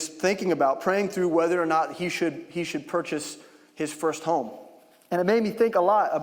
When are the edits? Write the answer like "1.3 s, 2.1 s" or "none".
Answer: none